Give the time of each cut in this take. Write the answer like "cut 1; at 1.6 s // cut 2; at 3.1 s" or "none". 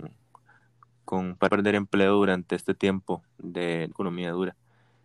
cut 1; at 1.5 s // cut 2; at 3.4 s // cut 3; at 3.9 s

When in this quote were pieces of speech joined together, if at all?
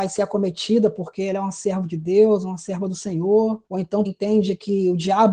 cut 1; at 3.7 s // cut 2; at 4.0 s

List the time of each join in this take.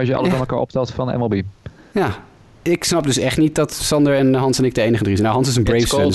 none

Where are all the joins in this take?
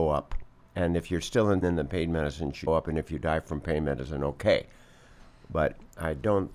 cut 1; at 1.6 s // cut 2; at 2.7 s

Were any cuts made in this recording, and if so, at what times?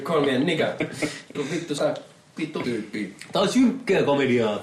cut 1; at 1.3 s // cut 2; at 1.8 s // cut 3; at 2.6 s

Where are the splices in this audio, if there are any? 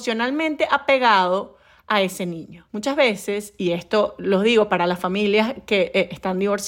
none

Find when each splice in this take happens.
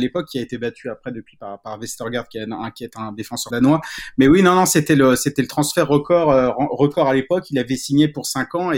cut 1; at 3.5 s

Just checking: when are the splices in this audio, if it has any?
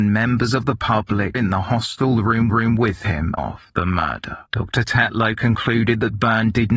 cut 1; at 1.3 s // cut 2; at 2.5 s // cut 3; at 3.4 s // cut 4; at 4.5 s

